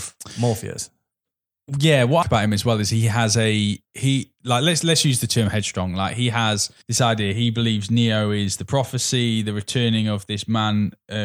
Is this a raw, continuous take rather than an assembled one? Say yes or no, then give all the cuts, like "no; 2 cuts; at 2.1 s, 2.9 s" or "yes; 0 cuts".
no; 3 cuts; at 2.2 s, 3.8 s, 6.8 s